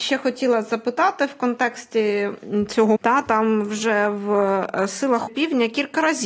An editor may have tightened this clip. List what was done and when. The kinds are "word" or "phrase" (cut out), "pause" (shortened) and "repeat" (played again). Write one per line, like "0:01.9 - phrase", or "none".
0:03.0 - word
0:05.3 - word